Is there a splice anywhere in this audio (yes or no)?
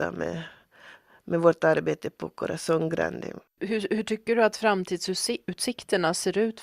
yes